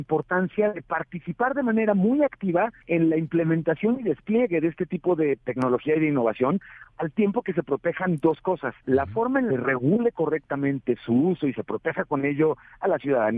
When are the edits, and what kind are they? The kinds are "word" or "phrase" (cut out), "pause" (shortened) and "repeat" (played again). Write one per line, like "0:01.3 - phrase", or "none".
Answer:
0:02.8 - pause
0:08.8 - pause
0:09.5 - phrase